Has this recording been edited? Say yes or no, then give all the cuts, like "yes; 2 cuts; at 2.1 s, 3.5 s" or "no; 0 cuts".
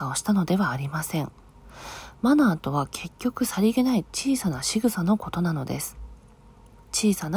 no; 0 cuts